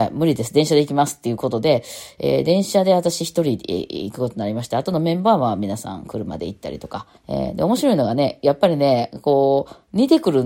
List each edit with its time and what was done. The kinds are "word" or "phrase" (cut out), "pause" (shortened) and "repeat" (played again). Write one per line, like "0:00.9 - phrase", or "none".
0:07.2 - pause